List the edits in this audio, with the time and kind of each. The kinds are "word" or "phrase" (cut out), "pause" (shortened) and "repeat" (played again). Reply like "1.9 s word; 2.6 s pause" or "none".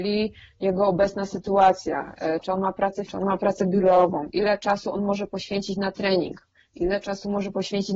3.1 s word